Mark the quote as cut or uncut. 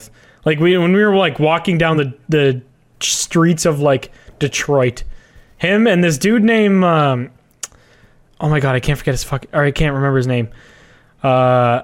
uncut